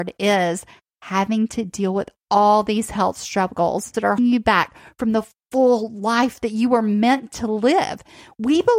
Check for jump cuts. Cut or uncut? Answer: cut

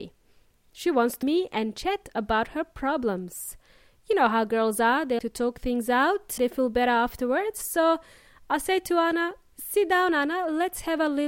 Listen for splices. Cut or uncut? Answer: cut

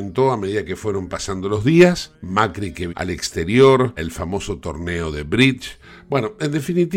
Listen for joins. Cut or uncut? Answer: cut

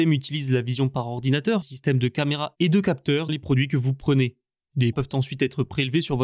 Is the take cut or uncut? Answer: cut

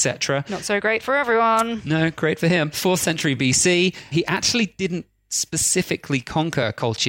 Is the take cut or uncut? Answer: uncut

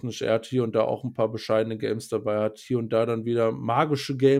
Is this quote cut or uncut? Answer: uncut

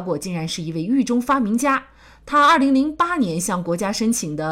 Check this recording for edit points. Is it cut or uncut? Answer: uncut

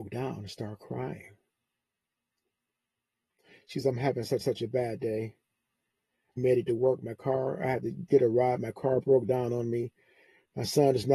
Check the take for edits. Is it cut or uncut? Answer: cut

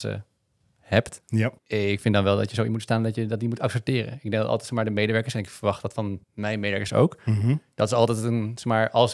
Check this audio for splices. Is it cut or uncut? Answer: cut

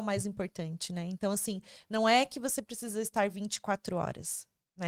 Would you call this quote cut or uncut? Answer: uncut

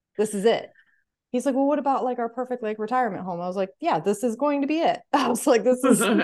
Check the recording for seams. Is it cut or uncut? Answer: uncut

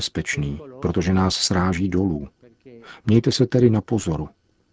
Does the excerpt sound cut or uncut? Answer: uncut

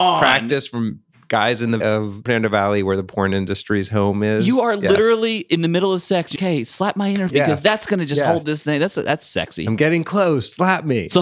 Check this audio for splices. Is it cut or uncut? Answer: cut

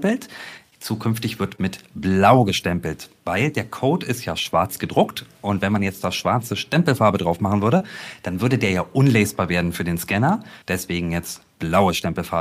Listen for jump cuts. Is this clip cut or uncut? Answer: cut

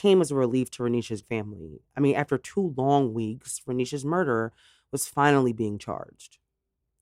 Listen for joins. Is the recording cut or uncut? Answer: cut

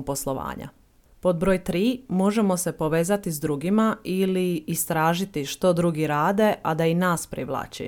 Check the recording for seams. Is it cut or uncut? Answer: uncut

